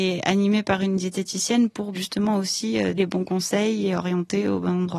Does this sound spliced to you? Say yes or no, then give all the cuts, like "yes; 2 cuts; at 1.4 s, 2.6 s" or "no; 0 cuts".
yes; 2 cuts; at 1.9 s, 3.0 s